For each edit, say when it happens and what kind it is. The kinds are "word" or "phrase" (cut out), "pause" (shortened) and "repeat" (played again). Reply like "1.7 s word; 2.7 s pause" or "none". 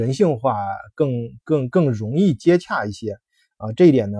1.4 s pause